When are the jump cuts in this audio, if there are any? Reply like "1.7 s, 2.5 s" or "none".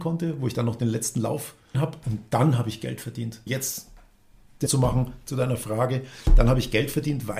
1.7 s, 3.5 s, 4.7 s